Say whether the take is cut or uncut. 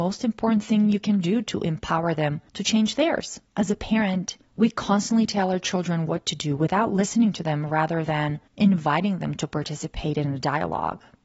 cut